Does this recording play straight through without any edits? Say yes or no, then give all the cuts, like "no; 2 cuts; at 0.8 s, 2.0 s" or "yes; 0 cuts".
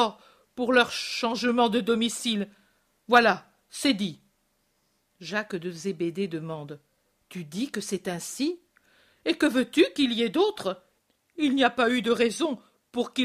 yes; 0 cuts